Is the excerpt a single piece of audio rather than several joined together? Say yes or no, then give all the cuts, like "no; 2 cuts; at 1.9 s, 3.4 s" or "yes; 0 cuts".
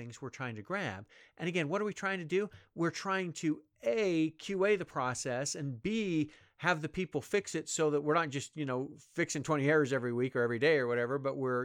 yes; 0 cuts